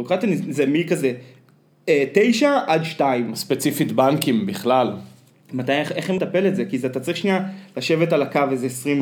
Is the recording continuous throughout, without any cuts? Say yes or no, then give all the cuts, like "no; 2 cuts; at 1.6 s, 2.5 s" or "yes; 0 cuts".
no; 1 cut; at 6.2 s